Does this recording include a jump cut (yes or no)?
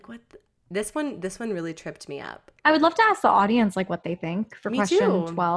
yes